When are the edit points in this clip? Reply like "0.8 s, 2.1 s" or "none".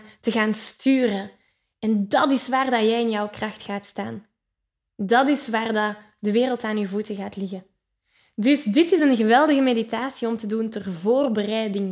none